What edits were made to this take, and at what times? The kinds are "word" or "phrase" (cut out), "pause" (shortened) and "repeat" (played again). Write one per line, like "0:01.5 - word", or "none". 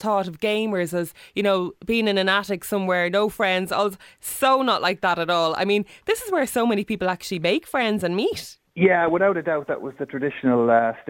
none